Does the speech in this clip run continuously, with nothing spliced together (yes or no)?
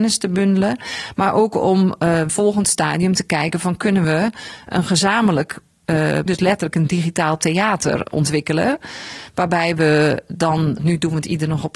no